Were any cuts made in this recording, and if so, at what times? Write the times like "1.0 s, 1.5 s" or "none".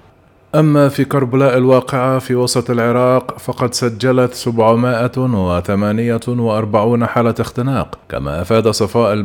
8.0 s

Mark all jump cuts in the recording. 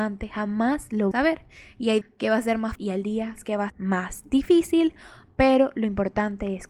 1.1 s, 2.0 s, 2.8 s, 3.7 s

